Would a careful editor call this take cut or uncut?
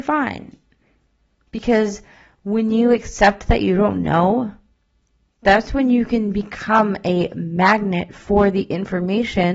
uncut